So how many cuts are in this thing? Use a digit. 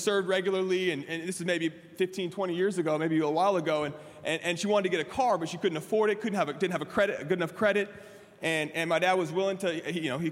0